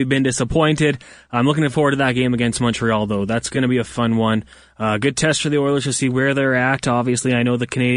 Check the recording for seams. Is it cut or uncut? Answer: uncut